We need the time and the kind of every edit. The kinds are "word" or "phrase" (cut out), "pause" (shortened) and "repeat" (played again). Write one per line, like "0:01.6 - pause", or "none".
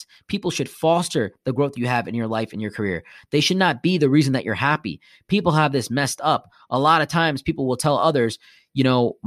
none